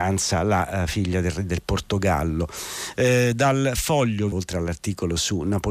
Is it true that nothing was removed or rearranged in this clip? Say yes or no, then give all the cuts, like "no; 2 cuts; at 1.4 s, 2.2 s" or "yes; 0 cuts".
no; 1 cut; at 4.3 s